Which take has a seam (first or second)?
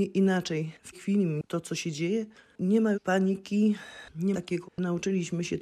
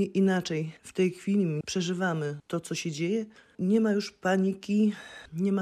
first